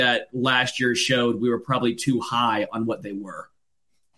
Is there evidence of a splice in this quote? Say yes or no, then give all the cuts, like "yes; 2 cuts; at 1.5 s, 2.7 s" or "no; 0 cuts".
no; 0 cuts